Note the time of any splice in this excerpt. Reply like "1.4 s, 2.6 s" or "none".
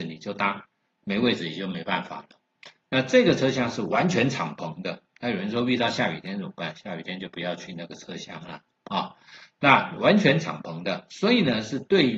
none